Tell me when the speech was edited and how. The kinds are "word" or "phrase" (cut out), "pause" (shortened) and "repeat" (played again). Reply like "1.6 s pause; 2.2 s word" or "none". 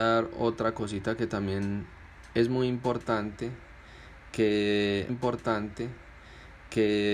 5.1 s repeat